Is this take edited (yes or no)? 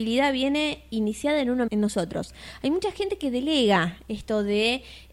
yes